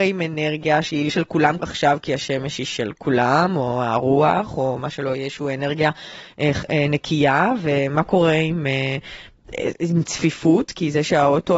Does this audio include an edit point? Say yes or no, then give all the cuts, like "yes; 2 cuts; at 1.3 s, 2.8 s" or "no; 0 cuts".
yes; 2 cuts; at 1.1 s, 1.6 s